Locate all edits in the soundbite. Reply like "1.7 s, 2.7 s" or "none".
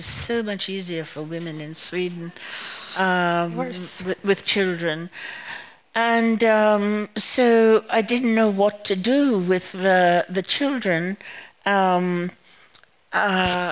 none